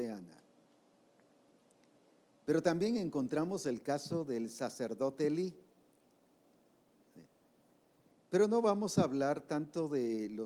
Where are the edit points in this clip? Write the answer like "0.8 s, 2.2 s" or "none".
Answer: none